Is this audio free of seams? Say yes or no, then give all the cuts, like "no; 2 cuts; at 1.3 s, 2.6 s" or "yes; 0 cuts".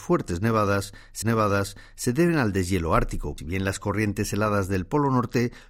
no; 2 cuts; at 1.2 s, 3.4 s